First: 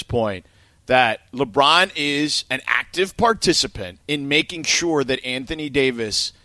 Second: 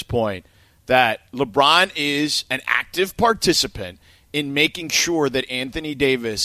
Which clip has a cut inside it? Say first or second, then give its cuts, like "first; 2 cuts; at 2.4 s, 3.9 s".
first; 1 cut; at 4.0 s